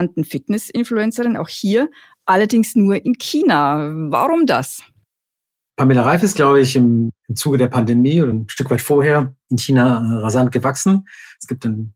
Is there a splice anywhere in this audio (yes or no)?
no